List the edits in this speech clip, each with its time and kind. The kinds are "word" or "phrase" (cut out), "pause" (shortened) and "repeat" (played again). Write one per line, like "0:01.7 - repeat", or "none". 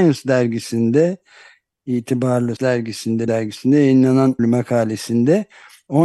0:02.6 - word
0:03.3 - word
0:04.4 - word